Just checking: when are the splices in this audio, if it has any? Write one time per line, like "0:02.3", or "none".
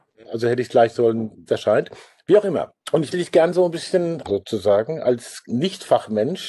0:00.9
0:01.5
0:02.8
0:03.1
0:04.2